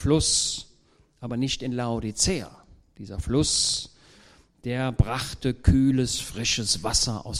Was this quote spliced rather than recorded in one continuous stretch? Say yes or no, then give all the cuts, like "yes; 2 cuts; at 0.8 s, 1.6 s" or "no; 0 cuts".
no; 0 cuts